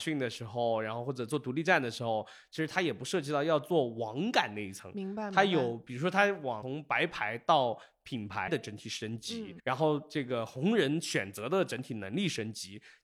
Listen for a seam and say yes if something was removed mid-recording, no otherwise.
yes